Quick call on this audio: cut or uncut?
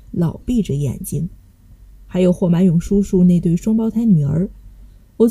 uncut